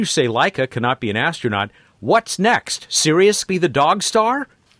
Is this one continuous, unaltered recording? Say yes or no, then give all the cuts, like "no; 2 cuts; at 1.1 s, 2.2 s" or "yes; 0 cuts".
no; 1 cut; at 3.5 s